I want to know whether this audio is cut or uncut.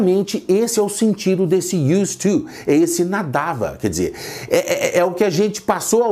uncut